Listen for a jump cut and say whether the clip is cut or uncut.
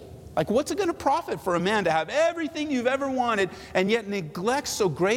uncut